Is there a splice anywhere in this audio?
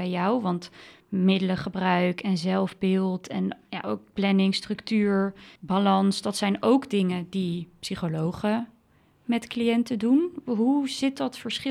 yes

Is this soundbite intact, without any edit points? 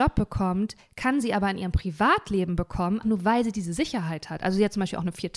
no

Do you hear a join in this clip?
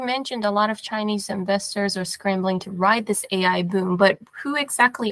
no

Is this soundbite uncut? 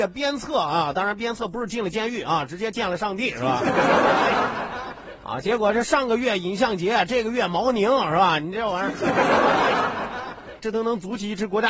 no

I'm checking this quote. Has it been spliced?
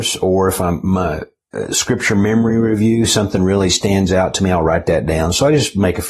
no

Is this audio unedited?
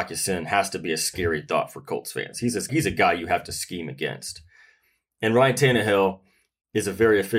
no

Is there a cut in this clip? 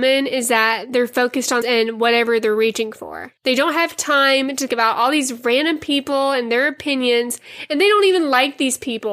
yes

